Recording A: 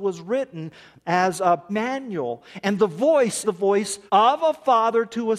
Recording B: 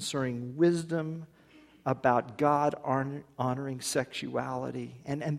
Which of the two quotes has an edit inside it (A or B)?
A